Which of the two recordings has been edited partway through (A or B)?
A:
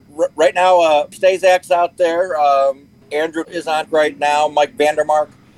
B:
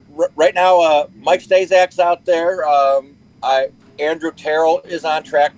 A